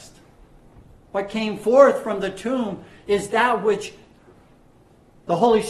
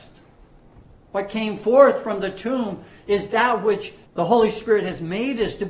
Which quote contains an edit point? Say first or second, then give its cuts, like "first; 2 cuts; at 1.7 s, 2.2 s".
second; 1 cut; at 4.1 s